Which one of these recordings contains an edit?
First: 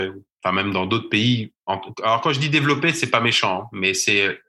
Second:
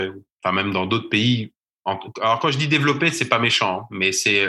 first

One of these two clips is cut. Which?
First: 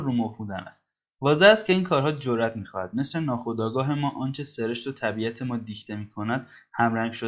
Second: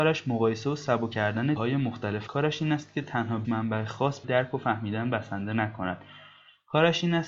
second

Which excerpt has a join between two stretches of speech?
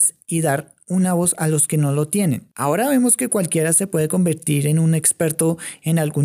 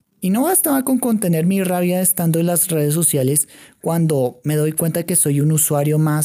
first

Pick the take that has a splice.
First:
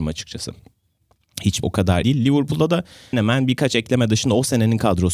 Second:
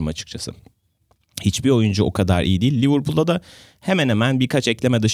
first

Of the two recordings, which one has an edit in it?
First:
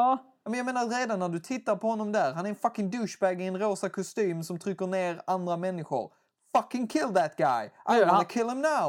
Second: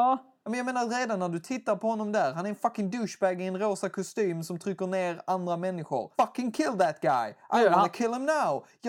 second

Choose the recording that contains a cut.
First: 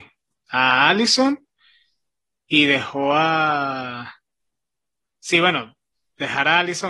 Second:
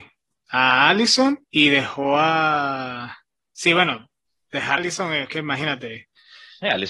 second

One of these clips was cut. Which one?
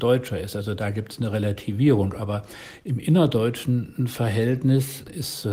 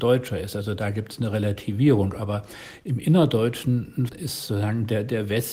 second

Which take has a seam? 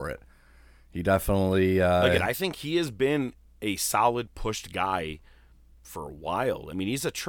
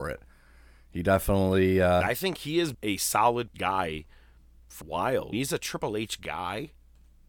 second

